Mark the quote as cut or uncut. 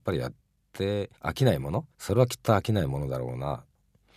cut